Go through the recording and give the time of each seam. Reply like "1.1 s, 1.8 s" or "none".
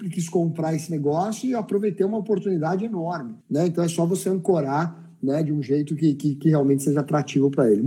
3.4 s